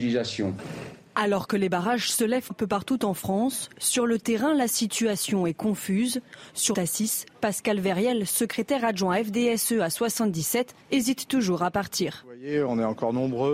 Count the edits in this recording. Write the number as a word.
three